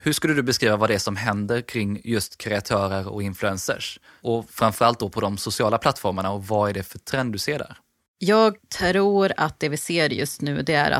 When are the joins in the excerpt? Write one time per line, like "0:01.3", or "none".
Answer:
none